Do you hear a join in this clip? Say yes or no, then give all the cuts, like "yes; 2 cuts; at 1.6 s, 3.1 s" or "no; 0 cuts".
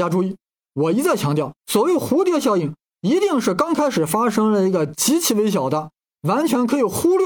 yes; 1 cut; at 1.6 s